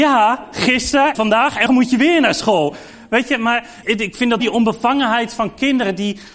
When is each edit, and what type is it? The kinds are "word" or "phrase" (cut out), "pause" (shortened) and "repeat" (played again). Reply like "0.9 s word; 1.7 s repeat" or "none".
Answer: 1.1 s word; 1.7 s word; 3.8 s word; 4.4 s word